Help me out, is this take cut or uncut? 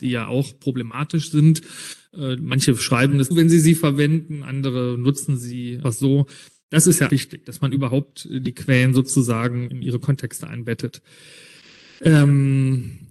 cut